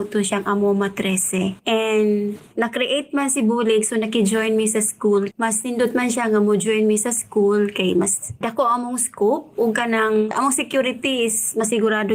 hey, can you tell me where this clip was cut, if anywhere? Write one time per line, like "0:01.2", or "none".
0:05.3
0:08.4